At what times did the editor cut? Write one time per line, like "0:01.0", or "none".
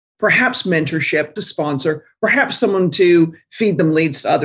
0:01.4